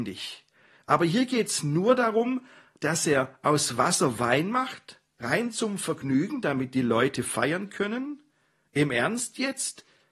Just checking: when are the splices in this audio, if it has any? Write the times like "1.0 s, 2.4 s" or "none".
none